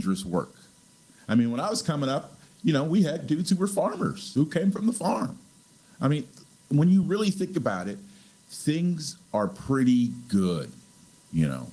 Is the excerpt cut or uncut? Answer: uncut